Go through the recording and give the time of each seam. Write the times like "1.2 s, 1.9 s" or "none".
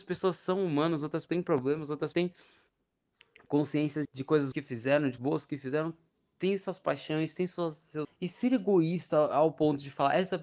1.3 s, 2.1 s, 4.0 s, 4.5 s, 5.2 s, 8.0 s

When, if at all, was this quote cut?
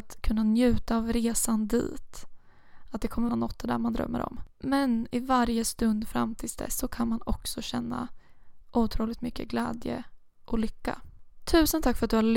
3.3 s, 4.5 s

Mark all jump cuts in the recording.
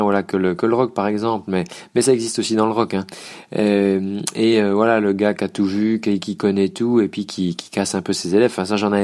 none

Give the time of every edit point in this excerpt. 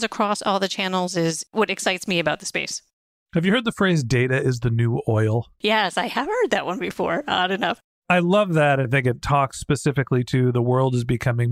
8.8 s

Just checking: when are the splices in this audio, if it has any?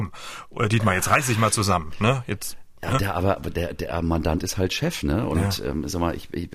none

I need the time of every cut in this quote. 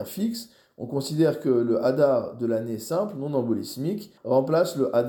4.2 s

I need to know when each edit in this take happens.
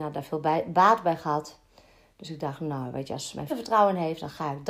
3.5 s

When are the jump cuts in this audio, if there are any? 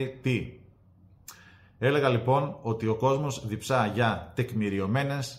none

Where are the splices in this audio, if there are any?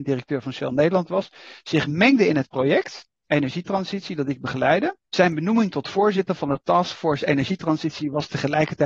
5.0 s

